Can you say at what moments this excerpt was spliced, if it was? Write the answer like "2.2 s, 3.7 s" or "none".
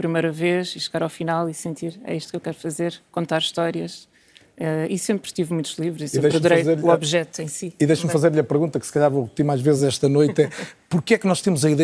none